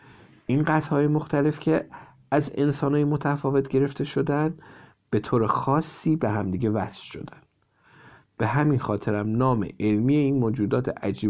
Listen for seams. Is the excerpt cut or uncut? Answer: uncut